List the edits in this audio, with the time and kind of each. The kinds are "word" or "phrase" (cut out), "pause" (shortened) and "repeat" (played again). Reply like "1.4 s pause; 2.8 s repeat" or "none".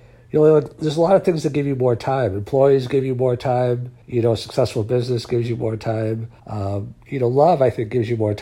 4.0 s pause; 6.4 s pause